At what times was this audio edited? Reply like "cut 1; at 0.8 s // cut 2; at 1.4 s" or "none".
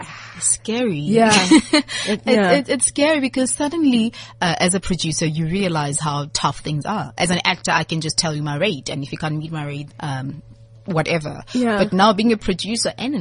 cut 1; at 9.9 s